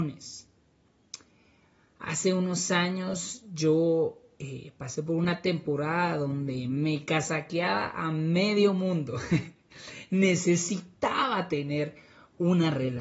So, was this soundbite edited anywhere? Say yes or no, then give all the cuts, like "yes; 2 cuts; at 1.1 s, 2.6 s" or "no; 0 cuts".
no; 0 cuts